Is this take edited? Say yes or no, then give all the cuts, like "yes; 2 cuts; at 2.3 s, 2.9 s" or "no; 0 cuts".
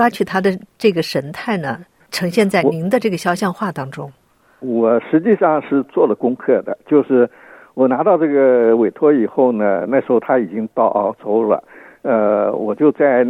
no; 0 cuts